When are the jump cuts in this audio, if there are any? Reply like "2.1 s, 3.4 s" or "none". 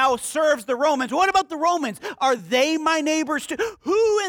none